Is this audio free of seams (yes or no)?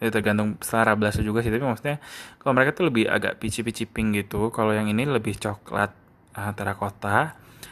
yes